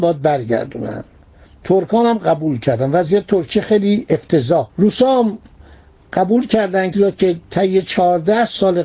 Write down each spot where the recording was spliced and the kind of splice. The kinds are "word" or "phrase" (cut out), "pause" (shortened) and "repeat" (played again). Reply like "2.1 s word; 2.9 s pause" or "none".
4.7 s word; 6.9 s phrase